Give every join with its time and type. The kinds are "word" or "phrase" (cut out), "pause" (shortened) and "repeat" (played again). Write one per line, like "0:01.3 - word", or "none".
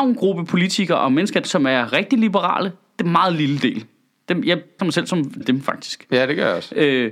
0:01.4 - word
0:04.8 - word
0:05.4 - word